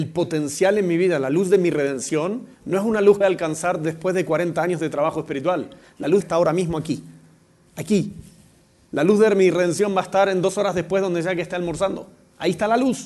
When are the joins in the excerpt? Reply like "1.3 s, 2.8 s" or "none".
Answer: 2.5 s, 3.2 s, 6.2 s